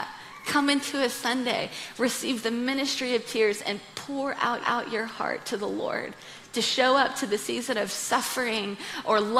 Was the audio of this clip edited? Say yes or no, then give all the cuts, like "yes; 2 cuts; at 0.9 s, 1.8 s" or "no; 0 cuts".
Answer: yes; 1 cut; at 4.6 s